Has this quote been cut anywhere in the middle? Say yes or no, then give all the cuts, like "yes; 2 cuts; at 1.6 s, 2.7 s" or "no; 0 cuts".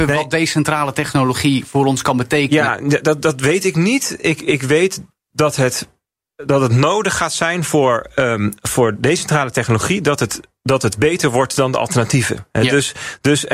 yes; 1 cut; at 4.4 s